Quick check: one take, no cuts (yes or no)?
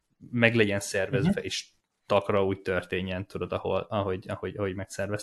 yes